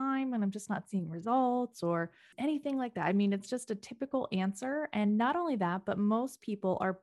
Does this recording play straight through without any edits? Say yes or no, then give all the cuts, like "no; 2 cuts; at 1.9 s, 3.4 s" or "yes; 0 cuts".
yes; 0 cuts